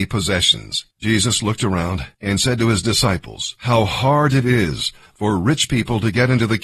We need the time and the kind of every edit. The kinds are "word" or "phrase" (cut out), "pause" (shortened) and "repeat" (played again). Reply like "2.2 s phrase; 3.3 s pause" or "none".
0.9 s pause; 2.1 s pause; 3.6 s pause